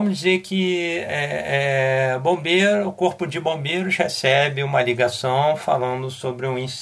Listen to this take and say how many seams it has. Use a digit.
0